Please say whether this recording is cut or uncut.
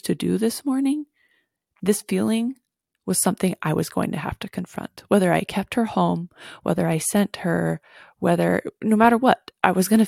uncut